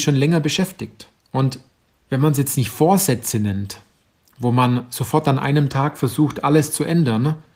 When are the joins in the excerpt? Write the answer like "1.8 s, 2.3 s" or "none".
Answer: none

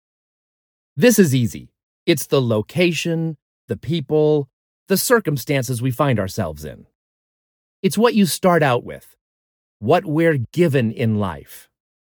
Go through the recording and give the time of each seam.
none

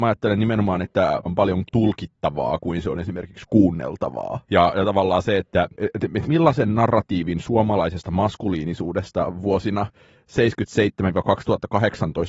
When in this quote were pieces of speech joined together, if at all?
1.3 s, 1.7 s, 4.4 s, 5.7 s, 6.2 s

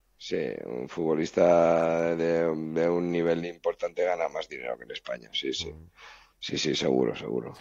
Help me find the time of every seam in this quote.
none

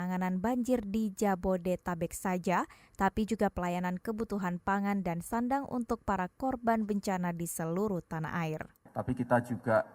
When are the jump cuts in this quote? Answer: none

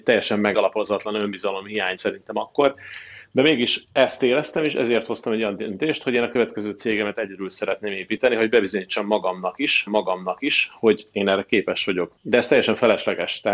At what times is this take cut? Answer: 2.0 s, 3.9 s, 9.9 s

